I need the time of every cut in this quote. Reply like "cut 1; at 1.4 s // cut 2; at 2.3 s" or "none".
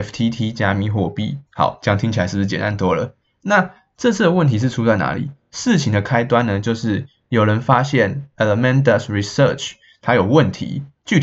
cut 1; at 1.5 s